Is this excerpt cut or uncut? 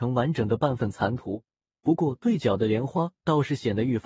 cut